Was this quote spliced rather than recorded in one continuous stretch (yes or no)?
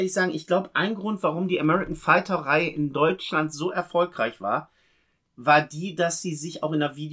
no